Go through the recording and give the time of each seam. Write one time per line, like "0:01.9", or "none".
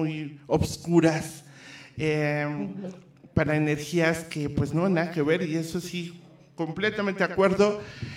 none